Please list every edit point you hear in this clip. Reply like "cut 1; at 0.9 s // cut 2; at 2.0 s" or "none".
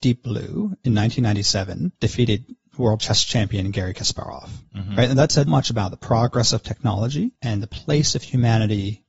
cut 1; at 2.0 s // cut 2; at 5.5 s // cut 3; at 7.4 s